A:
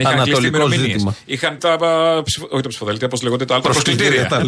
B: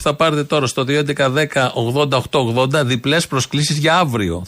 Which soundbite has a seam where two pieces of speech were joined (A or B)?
A